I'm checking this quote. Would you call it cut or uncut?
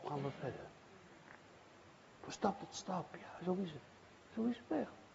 uncut